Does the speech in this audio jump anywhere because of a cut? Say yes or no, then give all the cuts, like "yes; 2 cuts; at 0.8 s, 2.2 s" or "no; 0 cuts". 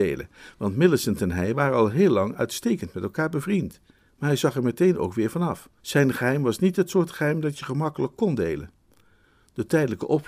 yes; 2 cuts; at 4.0 s, 5.8 s